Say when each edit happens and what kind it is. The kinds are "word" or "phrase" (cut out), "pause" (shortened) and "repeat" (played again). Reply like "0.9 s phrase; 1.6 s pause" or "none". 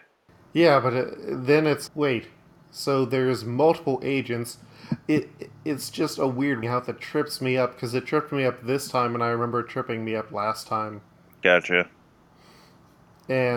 1.9 s word; 6.6 s word

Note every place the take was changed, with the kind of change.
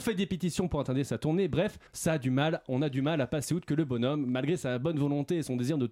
1.9 s pause

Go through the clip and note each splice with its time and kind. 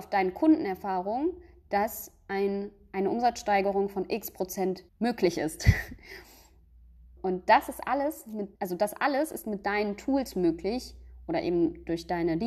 4.9 s pause; 7.2 s word; 8.6 s pause

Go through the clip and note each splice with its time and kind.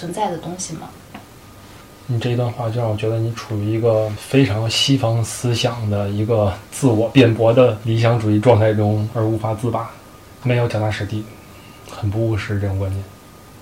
none

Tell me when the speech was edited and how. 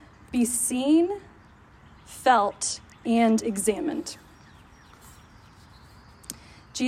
2.9 s pause

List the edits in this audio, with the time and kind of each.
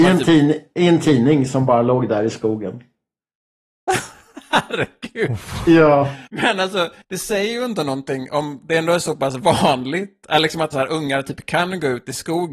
6.3 s pause; 7.0 s pause; 10.7 s word

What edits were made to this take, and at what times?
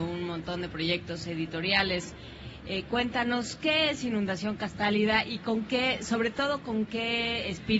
none

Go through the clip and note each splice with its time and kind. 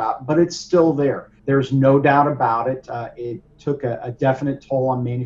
1.4 s pause

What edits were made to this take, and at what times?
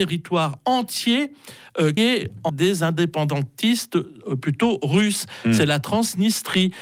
2.0 s word; 2.5 s phrase

